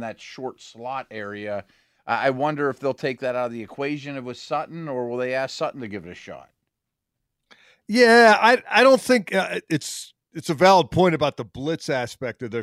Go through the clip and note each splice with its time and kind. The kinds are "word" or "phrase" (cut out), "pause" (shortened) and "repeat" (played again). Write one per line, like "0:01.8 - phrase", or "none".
none